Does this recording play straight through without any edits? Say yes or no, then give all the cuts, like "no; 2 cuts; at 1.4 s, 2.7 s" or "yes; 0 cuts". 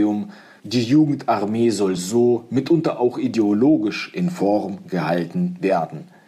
yes; 0 cuts